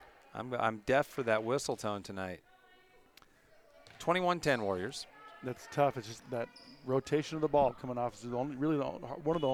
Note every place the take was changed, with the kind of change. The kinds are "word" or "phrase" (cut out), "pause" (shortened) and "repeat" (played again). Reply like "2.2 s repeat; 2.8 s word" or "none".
6.2 s word

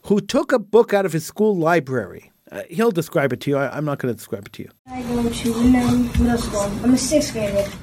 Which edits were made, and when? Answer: 2.4 s pause; 4.8 s pause

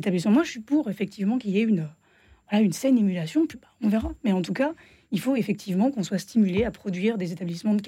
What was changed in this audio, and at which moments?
none

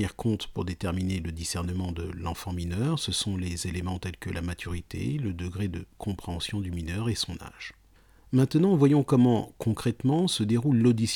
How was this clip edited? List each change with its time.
none

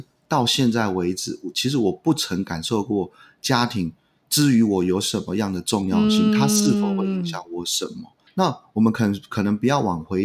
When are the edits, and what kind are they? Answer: 8.3 s word

